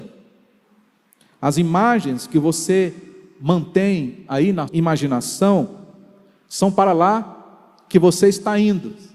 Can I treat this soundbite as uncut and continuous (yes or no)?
no